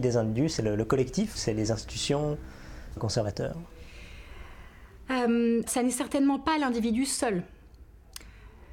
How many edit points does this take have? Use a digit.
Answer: 3